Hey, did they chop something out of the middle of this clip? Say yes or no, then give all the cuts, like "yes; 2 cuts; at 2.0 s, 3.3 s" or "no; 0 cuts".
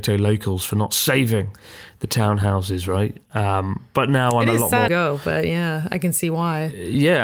yes; 1 cut; at 4.9 s